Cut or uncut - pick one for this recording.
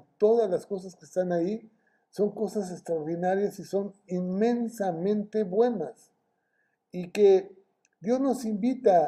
uncut